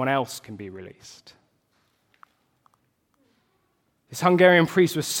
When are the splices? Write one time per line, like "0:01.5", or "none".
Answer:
none